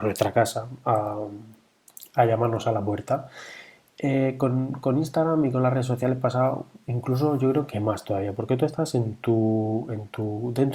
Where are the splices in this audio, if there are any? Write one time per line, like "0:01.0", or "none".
none